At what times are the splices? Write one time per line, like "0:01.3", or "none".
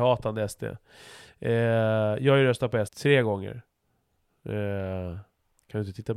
0:02.9